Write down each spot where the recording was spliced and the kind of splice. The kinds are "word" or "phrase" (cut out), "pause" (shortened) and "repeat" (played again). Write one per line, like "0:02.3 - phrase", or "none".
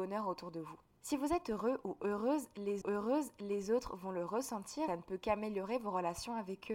0:02.8 - repeat
0:04.9 - phrase